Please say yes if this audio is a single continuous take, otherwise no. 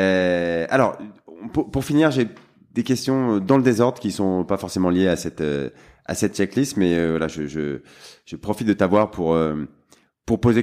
yes